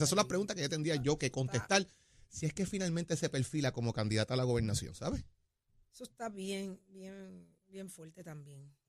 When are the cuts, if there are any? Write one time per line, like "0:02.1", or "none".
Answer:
none